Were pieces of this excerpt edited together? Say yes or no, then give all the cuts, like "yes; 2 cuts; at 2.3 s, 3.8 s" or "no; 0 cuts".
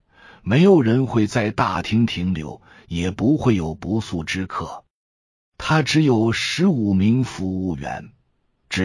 no; 0 cuts